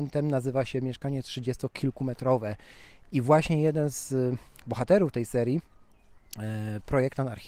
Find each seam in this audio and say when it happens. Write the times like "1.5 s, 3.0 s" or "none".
none